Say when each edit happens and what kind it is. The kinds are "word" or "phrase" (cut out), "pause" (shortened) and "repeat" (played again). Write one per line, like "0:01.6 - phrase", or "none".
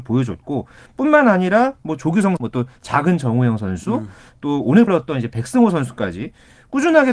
0:02.4 - word
0:04.9 - word